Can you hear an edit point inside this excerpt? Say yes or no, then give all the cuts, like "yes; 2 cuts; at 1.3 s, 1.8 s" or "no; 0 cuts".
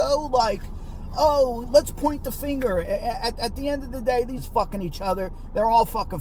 yes; 2 cuts; at 1.6 s, 4.4 s